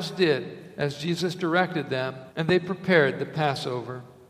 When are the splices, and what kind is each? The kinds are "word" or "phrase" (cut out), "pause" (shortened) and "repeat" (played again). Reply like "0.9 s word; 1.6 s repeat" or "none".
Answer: 2.3 s pause